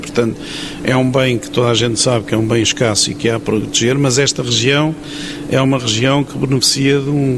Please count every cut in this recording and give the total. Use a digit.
0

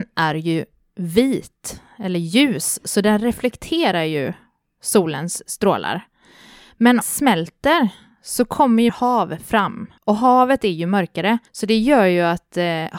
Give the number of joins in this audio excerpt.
4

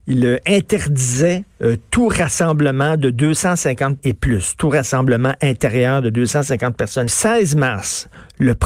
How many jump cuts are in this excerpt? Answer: 2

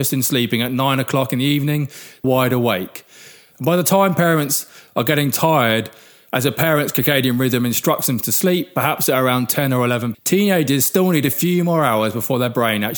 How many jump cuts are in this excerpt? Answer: 2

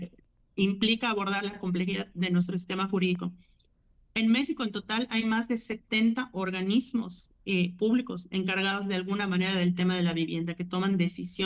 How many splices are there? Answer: 0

